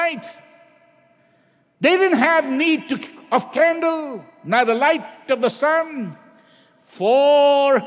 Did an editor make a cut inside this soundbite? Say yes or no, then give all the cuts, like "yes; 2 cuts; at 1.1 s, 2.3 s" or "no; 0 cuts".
no; 0 cuts